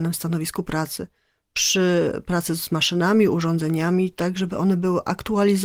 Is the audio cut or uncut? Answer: uncut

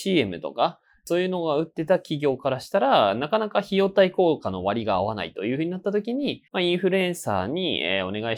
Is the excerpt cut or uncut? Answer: cut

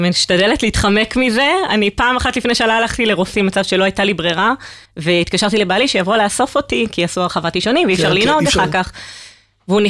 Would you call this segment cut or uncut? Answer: cut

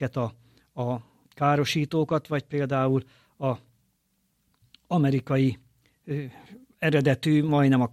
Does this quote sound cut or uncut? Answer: uncut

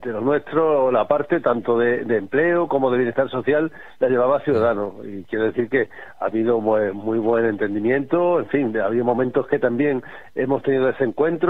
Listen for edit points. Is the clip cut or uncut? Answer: uncut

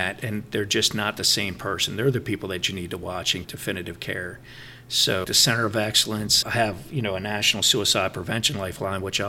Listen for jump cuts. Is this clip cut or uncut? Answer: cut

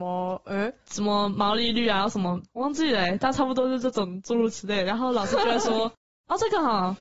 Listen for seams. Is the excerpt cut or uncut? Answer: cut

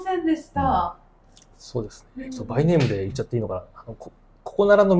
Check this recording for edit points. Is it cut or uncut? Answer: uncut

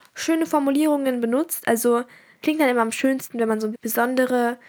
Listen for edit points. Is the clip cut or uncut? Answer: cut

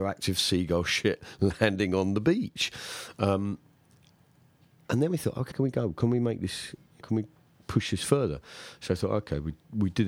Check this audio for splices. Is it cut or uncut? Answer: cut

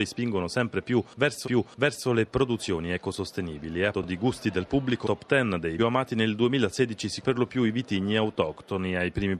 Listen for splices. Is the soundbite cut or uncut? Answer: cut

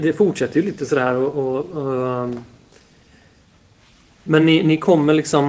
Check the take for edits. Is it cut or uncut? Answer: uncut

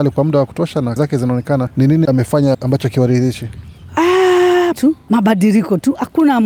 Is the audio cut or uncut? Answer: cut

